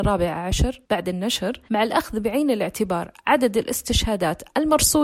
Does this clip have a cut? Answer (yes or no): yes